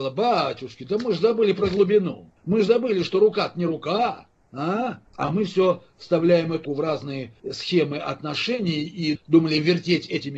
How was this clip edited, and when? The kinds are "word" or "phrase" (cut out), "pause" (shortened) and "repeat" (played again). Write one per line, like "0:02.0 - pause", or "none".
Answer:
0:02.4 - pause
0:05.1 - pause
0:06.6 - word
0:07.4 - pause